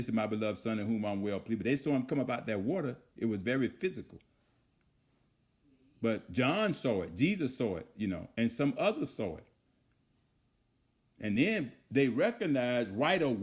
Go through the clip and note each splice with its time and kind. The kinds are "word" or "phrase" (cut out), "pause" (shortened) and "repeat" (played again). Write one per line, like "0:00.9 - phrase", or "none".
none

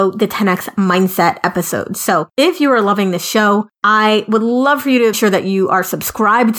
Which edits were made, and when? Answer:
0:02.3 - pause
0:03.7 - pause
0:05.1 - word

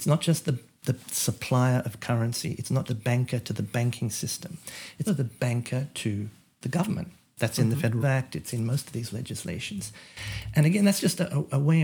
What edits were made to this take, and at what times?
0:02.8 - word
0:05.1 - word
0:08.0 - word

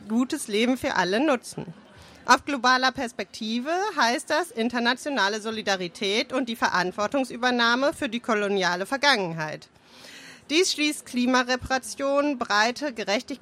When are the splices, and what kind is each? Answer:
none

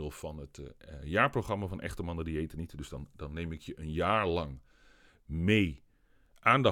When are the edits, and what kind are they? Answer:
none

